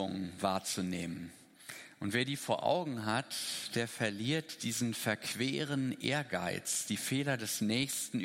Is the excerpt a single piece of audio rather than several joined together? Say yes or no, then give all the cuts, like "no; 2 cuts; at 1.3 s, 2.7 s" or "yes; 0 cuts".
yes; 0 cuts